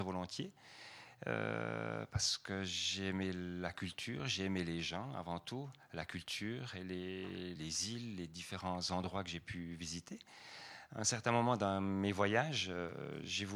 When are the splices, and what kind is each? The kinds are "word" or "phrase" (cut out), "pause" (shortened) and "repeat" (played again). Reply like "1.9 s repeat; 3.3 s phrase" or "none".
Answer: 7.6 s word